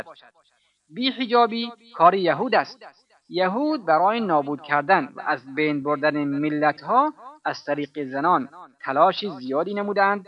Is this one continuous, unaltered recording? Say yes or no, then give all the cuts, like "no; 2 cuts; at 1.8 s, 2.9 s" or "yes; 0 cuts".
yes; 0 cuts